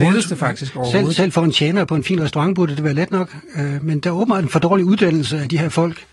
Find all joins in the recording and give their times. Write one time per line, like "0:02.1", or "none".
none